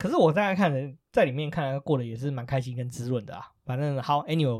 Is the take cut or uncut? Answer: cut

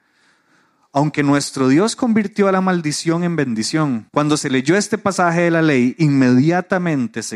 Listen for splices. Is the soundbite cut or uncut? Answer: cut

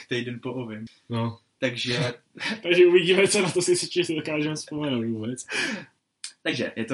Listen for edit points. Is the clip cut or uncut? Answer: uncut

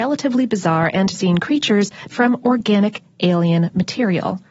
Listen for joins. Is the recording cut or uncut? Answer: cut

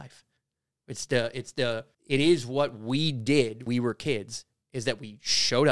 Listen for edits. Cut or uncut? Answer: cut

